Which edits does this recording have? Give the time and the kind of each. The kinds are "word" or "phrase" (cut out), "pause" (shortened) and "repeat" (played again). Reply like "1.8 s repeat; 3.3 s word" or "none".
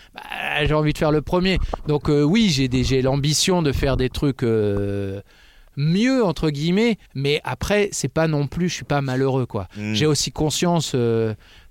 7.1 s pause